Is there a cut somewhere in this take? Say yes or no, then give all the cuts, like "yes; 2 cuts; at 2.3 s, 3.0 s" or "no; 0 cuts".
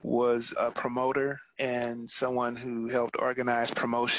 no; 0 cuts